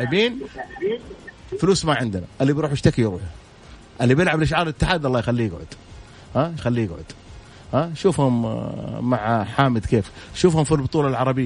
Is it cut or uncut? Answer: cut